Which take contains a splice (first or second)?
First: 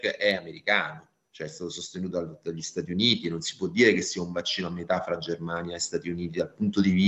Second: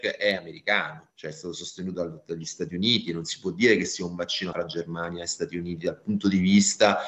second